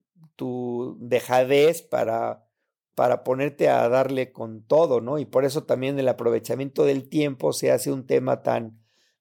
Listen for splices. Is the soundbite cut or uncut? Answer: uncut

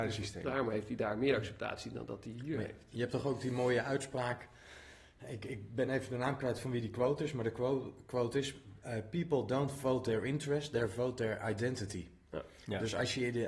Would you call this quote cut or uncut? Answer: uncut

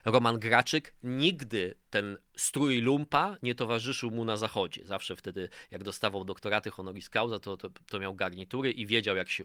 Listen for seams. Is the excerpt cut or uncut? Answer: uncut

